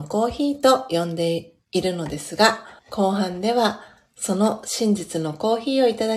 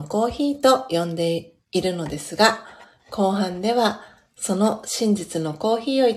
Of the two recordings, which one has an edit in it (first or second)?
first